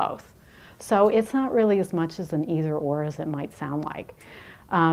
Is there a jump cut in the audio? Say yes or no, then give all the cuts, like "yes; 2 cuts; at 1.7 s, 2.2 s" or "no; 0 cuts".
no; 0 cuts